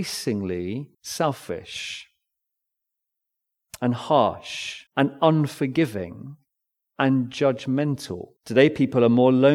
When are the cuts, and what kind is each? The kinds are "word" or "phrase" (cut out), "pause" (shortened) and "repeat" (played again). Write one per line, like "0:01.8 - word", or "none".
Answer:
0:00.9 - pause
0:04.9 - pause
0:06.5 - pause
0:08.4 - pause